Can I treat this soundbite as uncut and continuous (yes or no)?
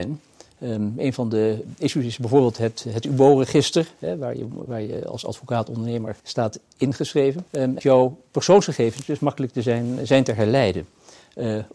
no